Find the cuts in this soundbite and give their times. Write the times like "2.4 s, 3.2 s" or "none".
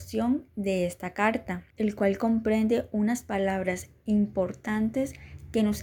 1.7 s